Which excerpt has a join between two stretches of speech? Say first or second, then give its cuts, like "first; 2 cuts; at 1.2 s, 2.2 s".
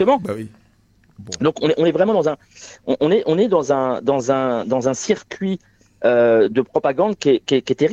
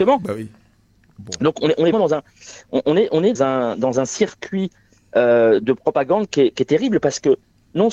second; 3 cuts; at 1.9 s, 3.4 s, 6.5 s